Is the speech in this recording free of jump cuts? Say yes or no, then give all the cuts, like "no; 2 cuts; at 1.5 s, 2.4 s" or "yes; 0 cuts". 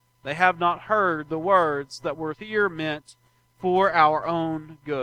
yes; 0 cuts